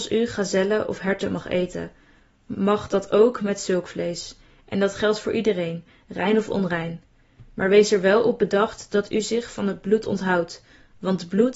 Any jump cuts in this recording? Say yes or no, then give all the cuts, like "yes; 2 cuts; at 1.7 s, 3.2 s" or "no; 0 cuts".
no; 0 cuts